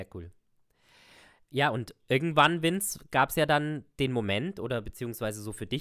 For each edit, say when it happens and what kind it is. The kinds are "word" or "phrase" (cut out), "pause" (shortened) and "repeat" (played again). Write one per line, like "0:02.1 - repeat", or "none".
none